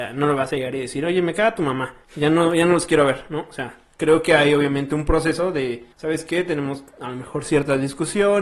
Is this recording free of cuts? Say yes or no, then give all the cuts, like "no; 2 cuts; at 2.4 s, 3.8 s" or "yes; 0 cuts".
no; 2 cuts; at 2.0 s, 5.9 s